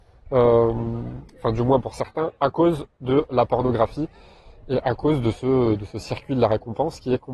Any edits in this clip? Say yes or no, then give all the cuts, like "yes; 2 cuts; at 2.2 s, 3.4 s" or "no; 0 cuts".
no; 0 cuts